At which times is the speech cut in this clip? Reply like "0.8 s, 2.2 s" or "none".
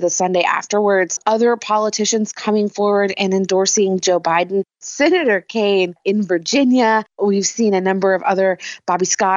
none